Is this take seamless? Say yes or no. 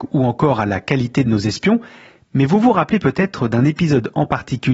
yes